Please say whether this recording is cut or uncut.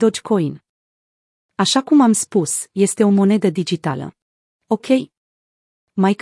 cut